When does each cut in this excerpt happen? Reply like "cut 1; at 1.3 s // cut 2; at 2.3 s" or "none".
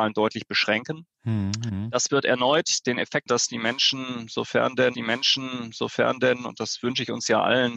cut 1; at 1.1 s // cut 2; at 3.3 s // cut 3; at 4.9 s

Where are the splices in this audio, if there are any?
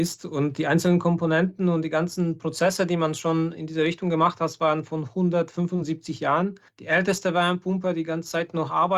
cut 1; at 6.7 s

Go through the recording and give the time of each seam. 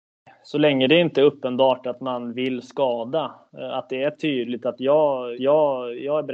cut 1; at 5.4 s

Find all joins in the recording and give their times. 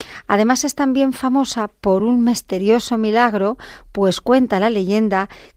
none

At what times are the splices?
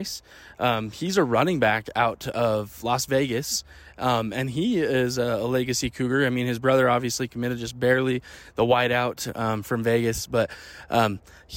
none

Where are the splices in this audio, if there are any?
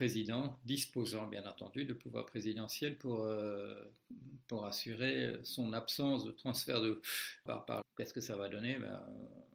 cut 1; at 7.5 s // cut 2; at 7.8 s

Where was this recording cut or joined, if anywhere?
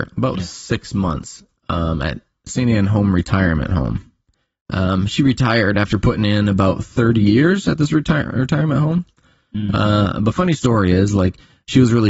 none

